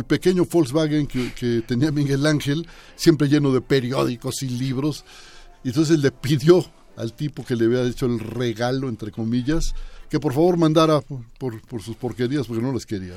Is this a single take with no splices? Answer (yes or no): yes